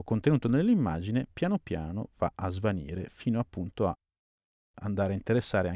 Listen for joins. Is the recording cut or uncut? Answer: uncut